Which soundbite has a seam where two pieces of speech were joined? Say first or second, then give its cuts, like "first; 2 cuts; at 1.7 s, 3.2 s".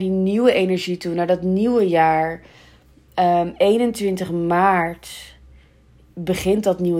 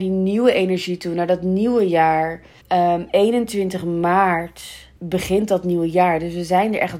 second; 2 cuts; at 2.6 s, 5.0 s